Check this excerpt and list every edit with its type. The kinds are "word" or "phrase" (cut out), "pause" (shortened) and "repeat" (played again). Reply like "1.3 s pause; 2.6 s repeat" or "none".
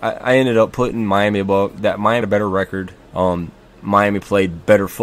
2.2 s word; 3.0 s pause